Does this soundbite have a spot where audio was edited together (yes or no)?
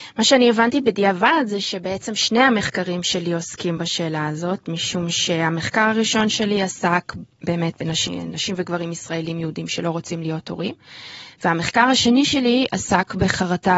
no